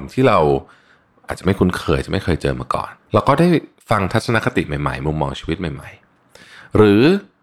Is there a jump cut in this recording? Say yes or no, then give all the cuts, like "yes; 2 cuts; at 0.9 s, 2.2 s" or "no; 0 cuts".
yes; 1 cut; at 3.0 s